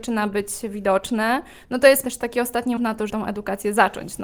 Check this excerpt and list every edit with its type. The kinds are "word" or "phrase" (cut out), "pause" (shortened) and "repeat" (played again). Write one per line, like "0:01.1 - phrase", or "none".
0:02.0 - word
0:02.8 - word
0:03.1 - word